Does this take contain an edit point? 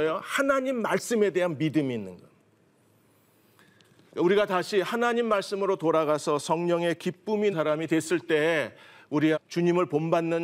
yes; 2 cuts; at 7.5 s, 9.3 s

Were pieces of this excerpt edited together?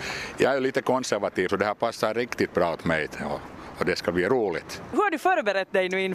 yes; 1 cut; at 1.5 s

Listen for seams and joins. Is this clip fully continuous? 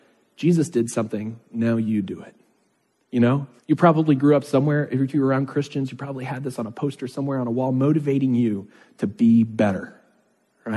no; 1 cut; at 3.6 s

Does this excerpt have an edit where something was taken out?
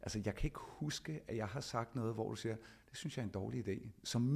no; 0 cuts

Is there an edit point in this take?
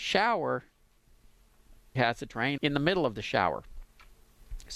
yes; 2 cuts; at 2.0 s, 2.6 s

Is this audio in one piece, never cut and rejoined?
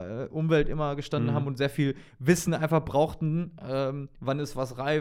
yes; 0 cuts

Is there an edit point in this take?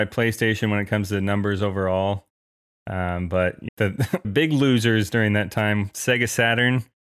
yes; 2 cuts; at 3.7 s, 4.2 s

